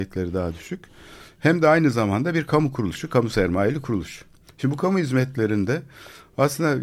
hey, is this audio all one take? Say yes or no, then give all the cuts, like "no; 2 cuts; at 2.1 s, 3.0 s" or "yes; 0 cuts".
yes; 0 cuts